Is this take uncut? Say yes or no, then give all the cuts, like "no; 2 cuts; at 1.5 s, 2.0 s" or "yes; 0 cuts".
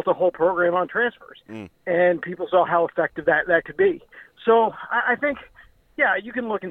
yes; 0 cuts